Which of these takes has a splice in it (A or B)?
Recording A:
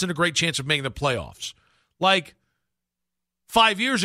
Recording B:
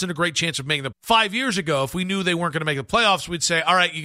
B